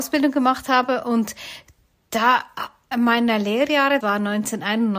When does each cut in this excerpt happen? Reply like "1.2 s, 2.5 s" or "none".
2.9 s, 4.0 s